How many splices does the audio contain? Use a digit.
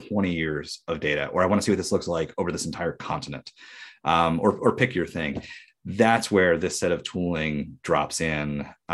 0